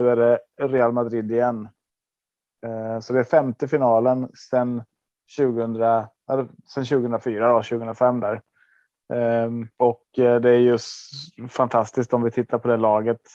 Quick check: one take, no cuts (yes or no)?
no